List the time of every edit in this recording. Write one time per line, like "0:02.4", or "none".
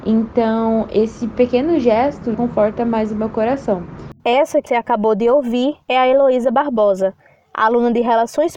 0:02.3
0:04.2
0:04.7
0:05.8